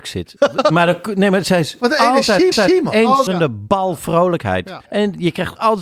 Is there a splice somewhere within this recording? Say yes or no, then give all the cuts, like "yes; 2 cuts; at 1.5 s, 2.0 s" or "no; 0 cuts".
yes; 3 cuts; at 2.5 s, 3.3 s, 4.8 s